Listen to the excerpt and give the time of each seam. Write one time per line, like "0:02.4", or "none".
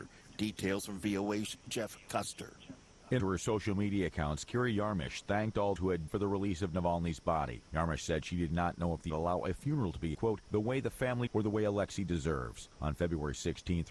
0:03.2
0:05.8
0:06.1
0:09.1
0:10.1
0:11.3